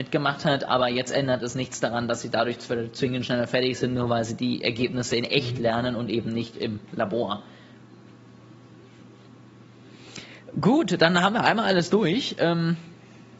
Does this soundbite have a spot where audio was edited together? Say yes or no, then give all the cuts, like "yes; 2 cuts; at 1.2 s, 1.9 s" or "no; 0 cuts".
no; 0 cuts